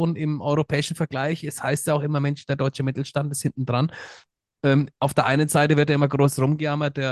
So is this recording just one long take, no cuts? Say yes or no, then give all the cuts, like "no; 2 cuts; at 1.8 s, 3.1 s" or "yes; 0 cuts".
yes; 0 cuts